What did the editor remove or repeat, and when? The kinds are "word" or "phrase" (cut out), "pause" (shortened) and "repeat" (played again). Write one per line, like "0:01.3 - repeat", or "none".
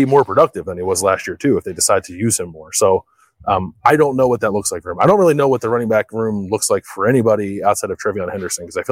none

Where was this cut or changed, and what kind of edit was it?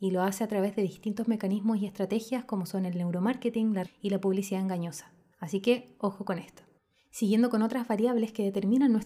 0:03.9 - word

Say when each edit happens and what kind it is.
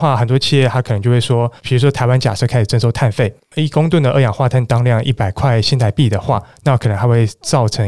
0:01.6 - pause

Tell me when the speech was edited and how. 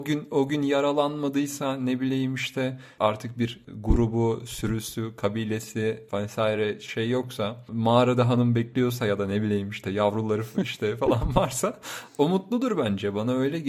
none

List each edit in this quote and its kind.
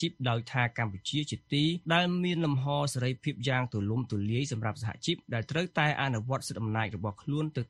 0:01.8 - pause

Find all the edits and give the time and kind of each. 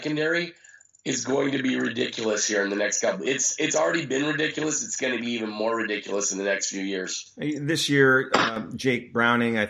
none

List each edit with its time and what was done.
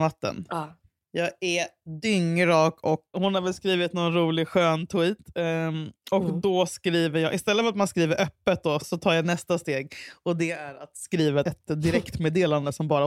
0:03.1 - word
0:08.8 - word
0:11.4 - word

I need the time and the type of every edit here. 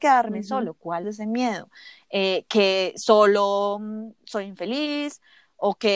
0:01.0 - phrase
0:02.9 - word

